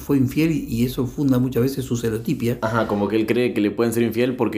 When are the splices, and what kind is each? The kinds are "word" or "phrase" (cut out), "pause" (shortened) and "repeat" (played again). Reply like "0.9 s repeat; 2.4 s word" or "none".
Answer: none